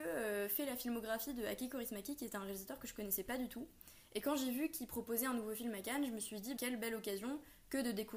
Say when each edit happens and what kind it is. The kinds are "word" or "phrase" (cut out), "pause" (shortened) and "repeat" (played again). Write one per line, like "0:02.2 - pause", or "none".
0:06.6 - word